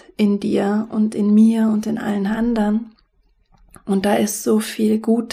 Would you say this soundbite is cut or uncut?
uncut